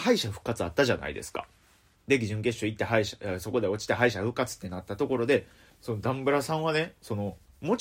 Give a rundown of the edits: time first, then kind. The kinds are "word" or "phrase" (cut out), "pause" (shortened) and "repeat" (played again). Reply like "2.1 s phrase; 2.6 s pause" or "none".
5.7 s word